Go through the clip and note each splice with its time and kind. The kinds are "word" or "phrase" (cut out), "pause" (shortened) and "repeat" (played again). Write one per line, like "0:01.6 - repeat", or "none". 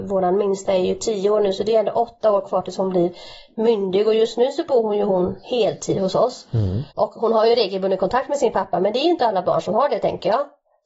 0:06.9 - pause